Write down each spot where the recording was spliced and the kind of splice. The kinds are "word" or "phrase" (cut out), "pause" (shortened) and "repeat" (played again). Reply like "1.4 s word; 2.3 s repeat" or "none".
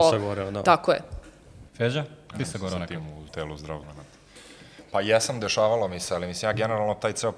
1.7 s pause; 2.4 s phrase; 3.3 s word; 3.8 s word